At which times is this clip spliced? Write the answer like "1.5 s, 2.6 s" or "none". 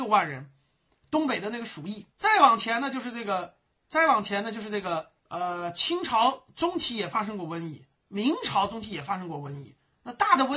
2.1 s, 5.2 s, 8.0 s